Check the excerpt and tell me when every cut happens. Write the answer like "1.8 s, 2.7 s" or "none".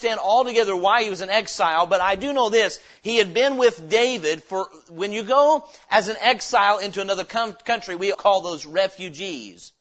8.1 s